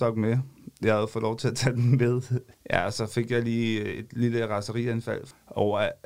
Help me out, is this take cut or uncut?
uncut